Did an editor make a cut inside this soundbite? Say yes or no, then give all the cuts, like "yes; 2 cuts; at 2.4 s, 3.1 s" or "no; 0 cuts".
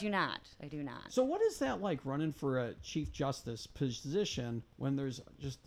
no; 0 cuts